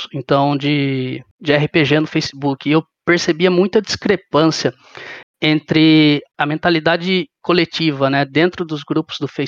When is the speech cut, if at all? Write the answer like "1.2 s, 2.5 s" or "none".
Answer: 6.3 s